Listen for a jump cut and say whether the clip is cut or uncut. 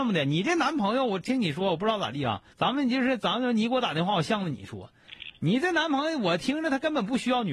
cut